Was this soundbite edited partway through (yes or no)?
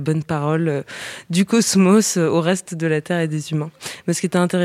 no